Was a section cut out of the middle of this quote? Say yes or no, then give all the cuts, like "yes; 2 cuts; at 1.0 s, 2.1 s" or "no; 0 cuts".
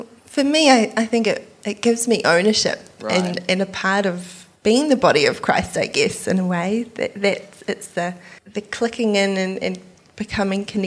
yes; 2 cuts; at 4.6 s, 8.4 s